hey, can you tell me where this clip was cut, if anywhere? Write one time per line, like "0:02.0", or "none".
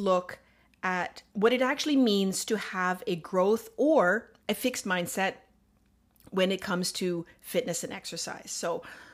0:01.3
0:04.4